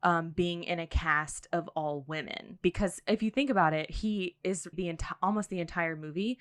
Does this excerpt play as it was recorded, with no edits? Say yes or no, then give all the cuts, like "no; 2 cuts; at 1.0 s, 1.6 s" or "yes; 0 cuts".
no; 1 cut; at 4.7 s